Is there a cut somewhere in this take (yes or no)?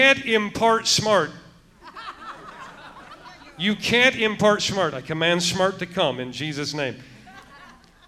no